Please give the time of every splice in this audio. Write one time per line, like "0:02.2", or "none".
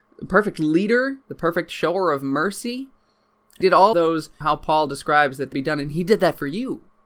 0:01.2
0:03.6
0:03.9
0:04.4
0:05.5